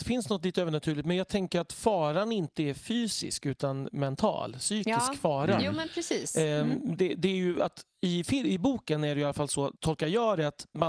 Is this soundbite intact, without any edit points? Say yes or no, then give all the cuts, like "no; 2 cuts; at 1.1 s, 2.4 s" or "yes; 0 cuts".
no; 1 cut; at 9.8 s